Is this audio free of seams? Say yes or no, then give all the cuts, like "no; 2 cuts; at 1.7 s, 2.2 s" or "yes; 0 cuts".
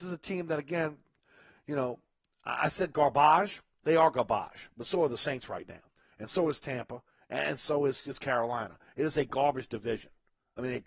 yes; 0 cuts